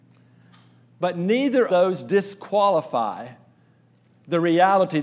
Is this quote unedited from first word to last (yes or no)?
no